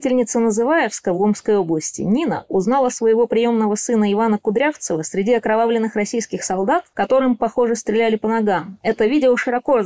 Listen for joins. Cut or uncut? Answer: uncut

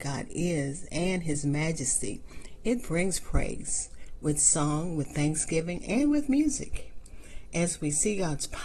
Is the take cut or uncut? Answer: uncut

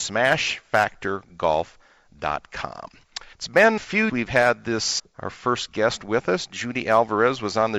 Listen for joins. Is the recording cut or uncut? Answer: cut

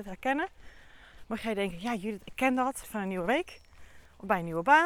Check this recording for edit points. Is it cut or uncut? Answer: cut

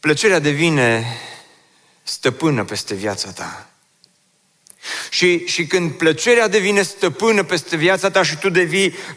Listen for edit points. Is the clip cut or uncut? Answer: uncut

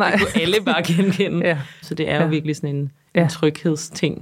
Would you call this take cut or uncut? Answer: cut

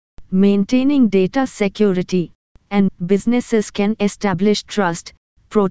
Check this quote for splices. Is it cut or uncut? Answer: cut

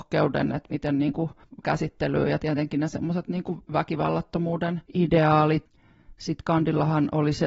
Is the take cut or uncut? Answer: cut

